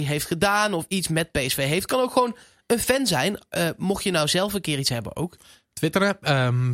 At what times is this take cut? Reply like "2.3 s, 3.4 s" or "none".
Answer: none